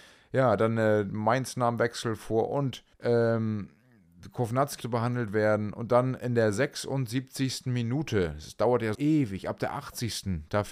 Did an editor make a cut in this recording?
yes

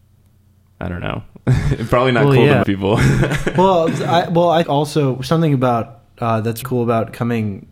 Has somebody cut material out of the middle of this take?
yes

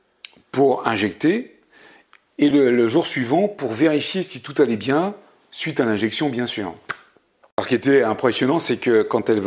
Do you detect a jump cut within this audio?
no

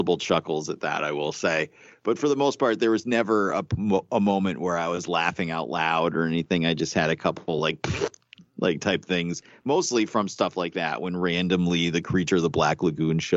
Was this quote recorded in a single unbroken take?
yes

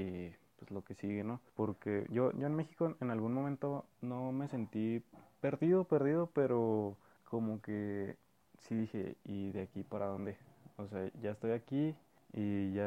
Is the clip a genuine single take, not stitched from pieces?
yes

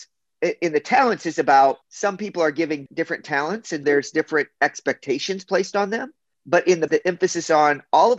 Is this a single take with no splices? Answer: no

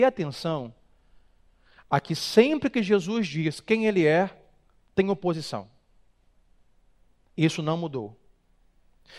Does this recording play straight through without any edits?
yes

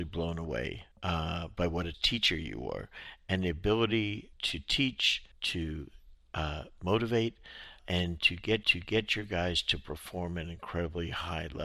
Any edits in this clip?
yes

